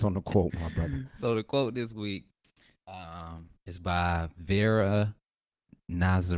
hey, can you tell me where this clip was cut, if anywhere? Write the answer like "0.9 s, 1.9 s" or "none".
none

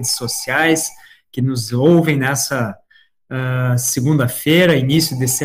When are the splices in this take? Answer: none

